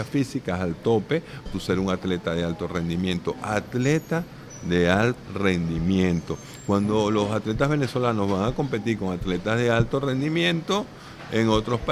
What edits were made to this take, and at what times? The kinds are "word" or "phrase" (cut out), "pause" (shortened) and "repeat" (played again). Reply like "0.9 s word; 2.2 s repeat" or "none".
1.5 s word; 5.2 s word

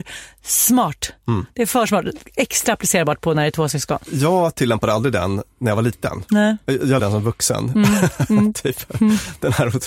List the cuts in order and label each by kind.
7.0 s phrase

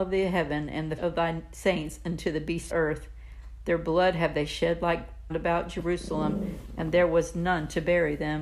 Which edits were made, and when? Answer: 1.0 s word; 2.7 s phrase; 5.3 s phrase

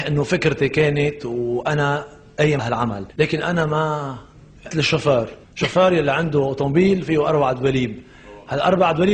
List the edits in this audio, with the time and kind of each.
2.6 s word; 3.1 s pause; 4.7 s word; 5.4 s pause

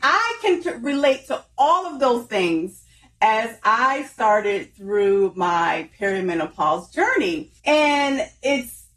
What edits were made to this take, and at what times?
7.6 s pause

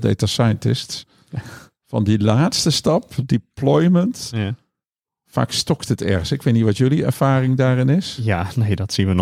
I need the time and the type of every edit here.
none

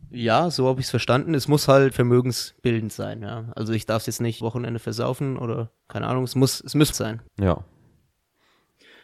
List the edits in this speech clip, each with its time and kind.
1.9 s word; 4.4 s word; 5.8 s pause; 6.9 s word; 7.3 s pause

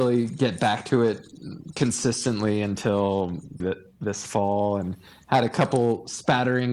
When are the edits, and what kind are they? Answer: 3.6 s word

